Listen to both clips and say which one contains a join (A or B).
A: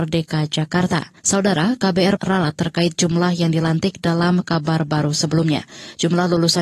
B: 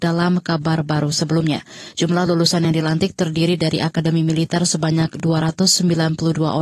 A